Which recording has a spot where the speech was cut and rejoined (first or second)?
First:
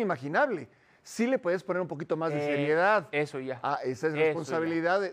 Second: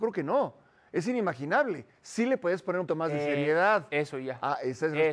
second